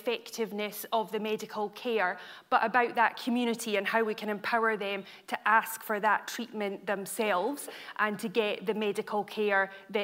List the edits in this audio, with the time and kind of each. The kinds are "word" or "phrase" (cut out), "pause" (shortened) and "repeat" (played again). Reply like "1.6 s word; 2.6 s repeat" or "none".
none